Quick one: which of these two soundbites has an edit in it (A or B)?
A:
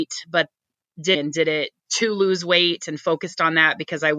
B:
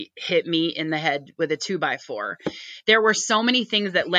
A